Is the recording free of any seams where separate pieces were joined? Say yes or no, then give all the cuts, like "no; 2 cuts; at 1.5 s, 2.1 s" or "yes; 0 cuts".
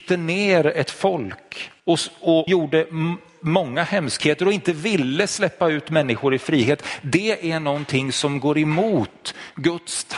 no; 2 cuts; at 1.8 s, 2.5 s